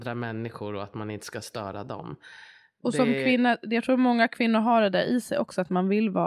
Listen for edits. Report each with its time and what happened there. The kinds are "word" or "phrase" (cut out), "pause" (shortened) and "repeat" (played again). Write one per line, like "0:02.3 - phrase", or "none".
none